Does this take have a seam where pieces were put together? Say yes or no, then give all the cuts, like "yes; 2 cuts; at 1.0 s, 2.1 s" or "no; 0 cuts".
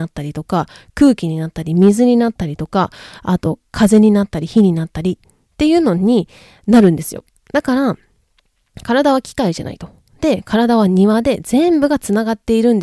no; 0 cuts